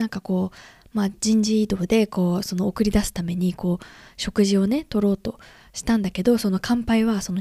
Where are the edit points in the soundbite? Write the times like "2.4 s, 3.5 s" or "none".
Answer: none

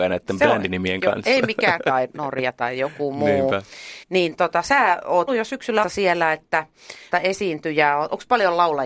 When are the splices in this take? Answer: 1.8 s, 4.0 s, 5.3 s, 5.8 s, 7.1 s

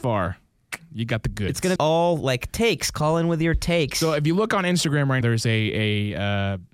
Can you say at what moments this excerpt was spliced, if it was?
1.8 s, 5.2 s

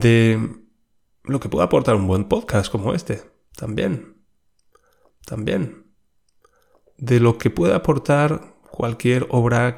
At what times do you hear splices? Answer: 5.1 s

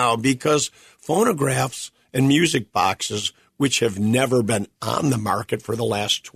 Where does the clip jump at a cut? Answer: none

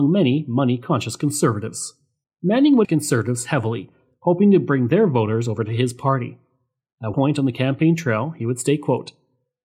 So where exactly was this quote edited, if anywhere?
2.2 s, 2.8 s, 7.1 s

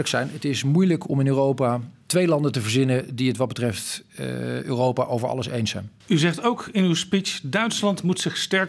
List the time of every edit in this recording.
6.0 s

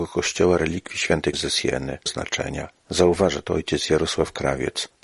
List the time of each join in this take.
1.3 s, 2.1 s

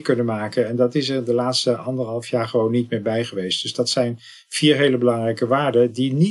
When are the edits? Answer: none

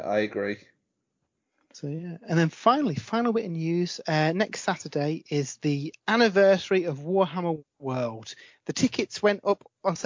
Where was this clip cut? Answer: none

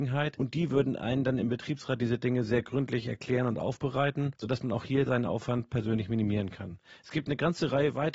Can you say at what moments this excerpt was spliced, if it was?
4.4 s

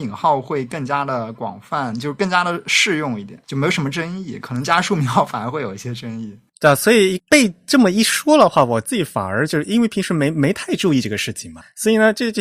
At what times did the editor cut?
3.4 s, 7.2 s

